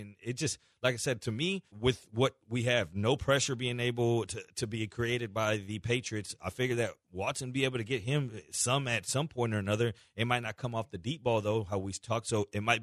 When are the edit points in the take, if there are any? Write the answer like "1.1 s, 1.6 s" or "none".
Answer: 1.7 s